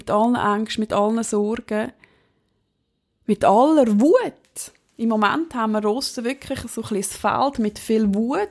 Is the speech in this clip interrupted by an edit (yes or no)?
no